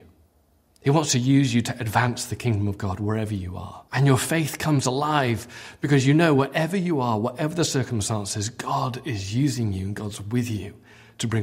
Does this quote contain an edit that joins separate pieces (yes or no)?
yes